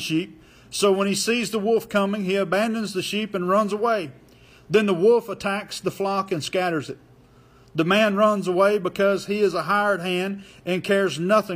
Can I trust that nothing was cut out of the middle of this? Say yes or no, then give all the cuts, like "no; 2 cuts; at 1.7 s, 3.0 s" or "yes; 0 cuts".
yes; 0 cuts